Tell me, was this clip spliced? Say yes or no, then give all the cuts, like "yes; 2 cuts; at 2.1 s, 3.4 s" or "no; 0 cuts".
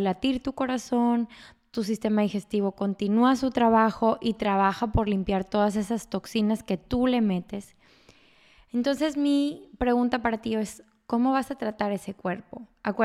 no; 0 cuts